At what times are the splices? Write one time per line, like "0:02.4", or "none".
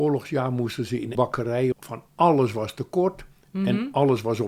0:01.1
0:01.7